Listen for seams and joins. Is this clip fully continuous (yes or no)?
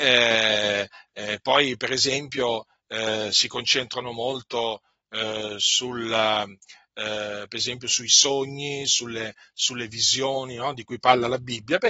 yes